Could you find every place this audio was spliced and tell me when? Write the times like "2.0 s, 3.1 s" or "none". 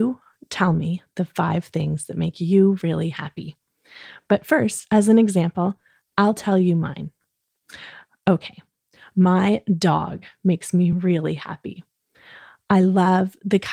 none